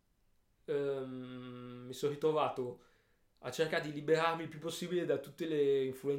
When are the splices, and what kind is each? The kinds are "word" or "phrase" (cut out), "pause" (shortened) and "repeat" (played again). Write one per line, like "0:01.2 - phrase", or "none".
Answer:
none